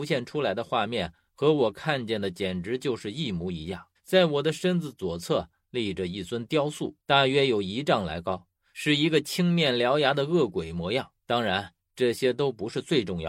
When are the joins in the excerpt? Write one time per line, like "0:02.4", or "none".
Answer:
0:04.0
0:07.0
0:11.2